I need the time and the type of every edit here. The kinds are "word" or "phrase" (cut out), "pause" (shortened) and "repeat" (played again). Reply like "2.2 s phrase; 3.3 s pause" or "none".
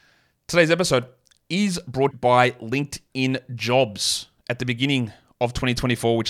2.1 s phrase